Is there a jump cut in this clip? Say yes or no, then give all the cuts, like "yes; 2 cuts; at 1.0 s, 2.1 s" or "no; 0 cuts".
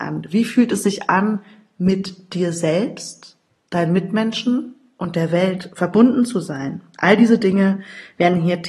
no; 0 cuts